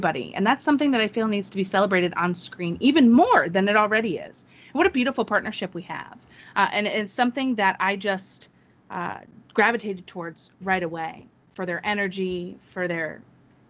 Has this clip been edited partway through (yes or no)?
no